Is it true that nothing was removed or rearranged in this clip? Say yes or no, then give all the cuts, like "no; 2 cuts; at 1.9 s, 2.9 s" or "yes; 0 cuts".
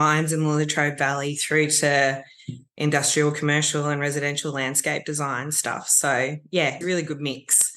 no; 1 cut; at 6.8 s